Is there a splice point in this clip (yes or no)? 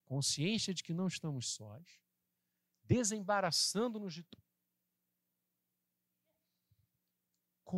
no